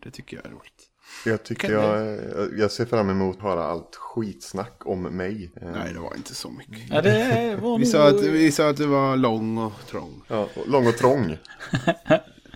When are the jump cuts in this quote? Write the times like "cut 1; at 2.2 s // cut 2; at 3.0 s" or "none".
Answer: cut 1; at 1.7 s // cut 2; at 3.4 s // cut 3; at 5.5 s // cut 4; at 10.2 s